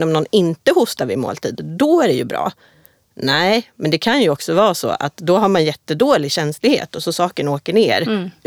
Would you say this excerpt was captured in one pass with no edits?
yes; 0 cuts

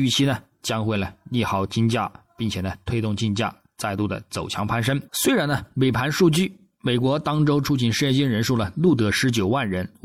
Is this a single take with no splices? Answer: no; 1 cut; at 5.1 s

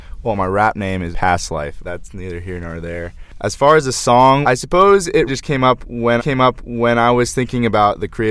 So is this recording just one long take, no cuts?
no; 5 cuts; at 1.1 s, 1.8 s, 4.4 s, 5.3 s, 6.2 s

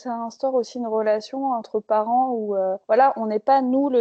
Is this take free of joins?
no; 1 cut; at 2.8 s

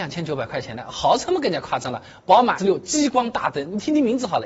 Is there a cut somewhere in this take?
yes; 1 cut; at 2.6 s

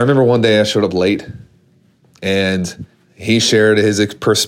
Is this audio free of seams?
no; 1 cut; at 2.9 s

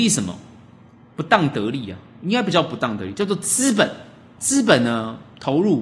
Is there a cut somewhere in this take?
no; 0 cuts

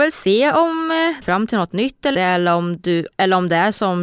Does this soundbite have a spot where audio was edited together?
yes; 3 cuts; at 1.2 s, 2.1 s, 3.1 s

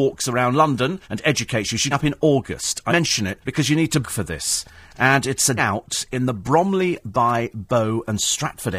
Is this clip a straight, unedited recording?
no; 6 cuts; at 1.0 s, 1.9 s, 2.9 s, 3.4 s, 4.0 s, 5.6 s

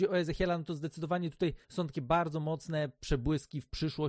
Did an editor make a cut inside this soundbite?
yes; 1 cut; at 1.6 s

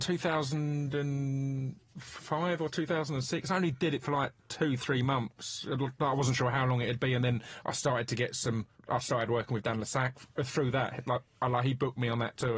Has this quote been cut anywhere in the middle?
yes; 2 cuts; at 4.4 s, 8.7 s

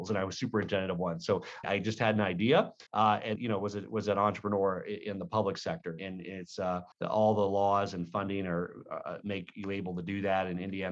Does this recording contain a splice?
yes; 5 cuts; at 1.6 s, 2.9 s, 3.4 s, 6.0 s, 6.9 s

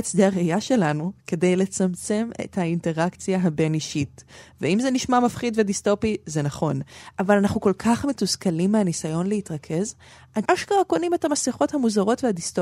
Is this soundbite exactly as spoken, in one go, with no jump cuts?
no; 1 cut; at 10.5 s

